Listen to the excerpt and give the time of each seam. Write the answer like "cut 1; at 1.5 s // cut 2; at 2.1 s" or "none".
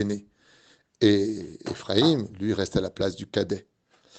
none